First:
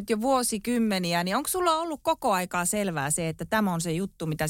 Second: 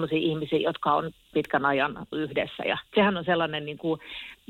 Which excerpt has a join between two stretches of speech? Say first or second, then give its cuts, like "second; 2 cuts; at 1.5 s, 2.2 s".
second; 3 cuts; at 1.3 s, 2.1 s, 2.9 s